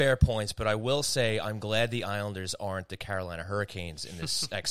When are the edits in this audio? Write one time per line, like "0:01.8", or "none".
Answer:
none